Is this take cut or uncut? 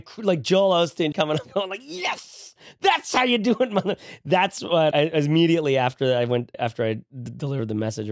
cut